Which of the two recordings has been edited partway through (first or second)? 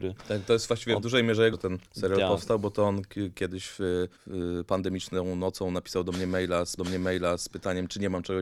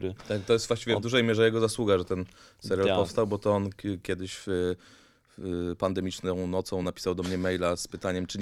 first